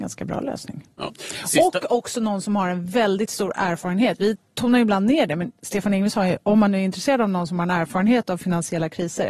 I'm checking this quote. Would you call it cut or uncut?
uncut